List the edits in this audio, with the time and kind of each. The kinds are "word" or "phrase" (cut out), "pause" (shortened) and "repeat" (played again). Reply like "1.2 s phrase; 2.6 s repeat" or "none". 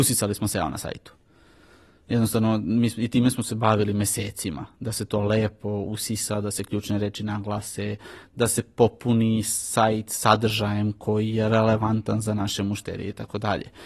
none